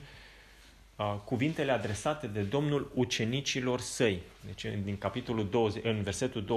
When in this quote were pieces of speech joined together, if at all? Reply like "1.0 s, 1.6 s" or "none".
none